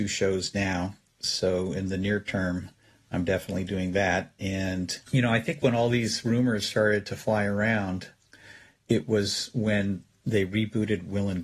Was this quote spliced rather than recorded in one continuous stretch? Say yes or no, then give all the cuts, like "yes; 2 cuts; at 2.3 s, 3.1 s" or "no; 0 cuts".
yes; 1 cut; at 5.0 s